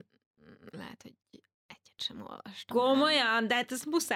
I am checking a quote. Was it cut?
no; 0 cuts

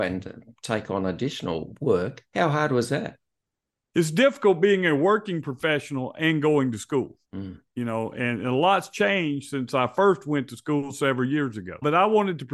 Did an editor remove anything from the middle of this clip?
yes; 3 cuts; at 2.3 s, 3.4 s, 7.2 s

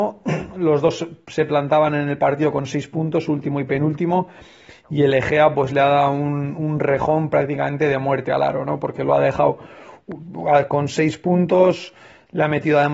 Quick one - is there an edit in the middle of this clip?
no; 0 cuts

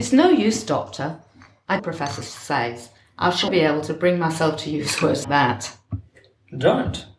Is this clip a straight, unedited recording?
no; 3 cuts; at 1.8 s, 3.5 s, 5.2 s

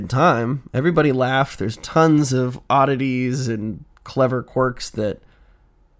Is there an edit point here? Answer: no; 0 cuts

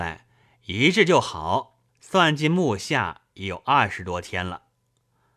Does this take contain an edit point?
yes; 1 cut; at 1.9 s

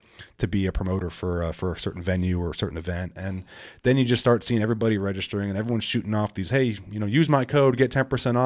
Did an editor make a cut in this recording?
no; 0 cuts

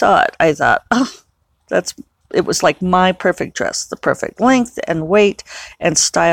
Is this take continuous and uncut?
yes; 0 cuts

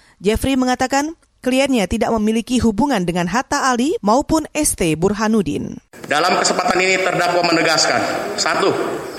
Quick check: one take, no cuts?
yes; 0 cuts

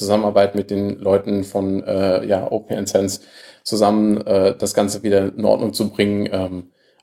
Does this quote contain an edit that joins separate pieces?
no; 0 cuts

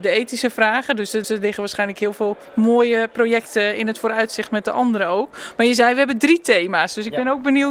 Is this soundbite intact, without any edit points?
no; 1 cut; at 1.2 s

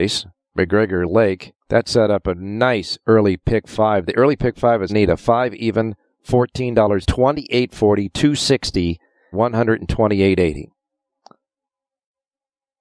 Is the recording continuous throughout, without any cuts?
no; 4 cuts; at 1.6 s, 4.9 s, 7.0 s, 9.3 s

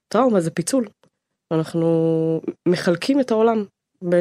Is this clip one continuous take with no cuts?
yes; 0 cuts

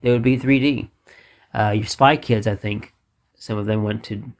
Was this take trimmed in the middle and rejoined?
no; 0 cuts

